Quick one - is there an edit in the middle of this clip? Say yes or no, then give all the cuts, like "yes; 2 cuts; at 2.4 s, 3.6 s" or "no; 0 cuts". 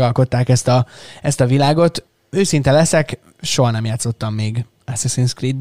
no; 0 cuts